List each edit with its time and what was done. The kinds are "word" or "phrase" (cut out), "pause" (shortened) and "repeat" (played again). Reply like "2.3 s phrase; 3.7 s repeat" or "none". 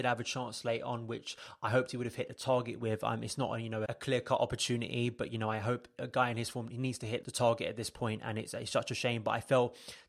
3.9 s word; 7.2 s word